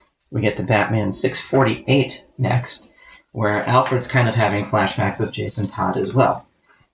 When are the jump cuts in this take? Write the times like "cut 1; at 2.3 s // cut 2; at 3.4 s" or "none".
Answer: none